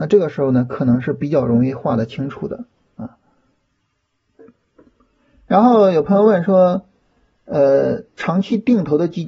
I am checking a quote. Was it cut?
no; 0 cuts

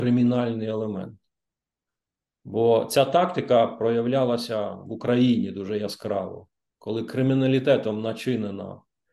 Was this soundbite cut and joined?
no; 0 cuts

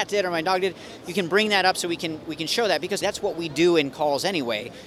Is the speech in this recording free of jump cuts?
no; 1 cut; at 3.0 s

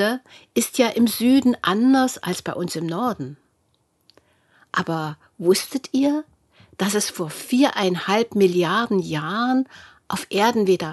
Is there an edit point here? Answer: no; 0 cuts

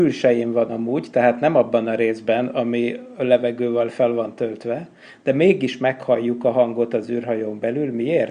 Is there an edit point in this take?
no; 0 cuts

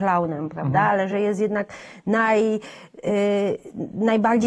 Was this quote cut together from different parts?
no; 0 cuts

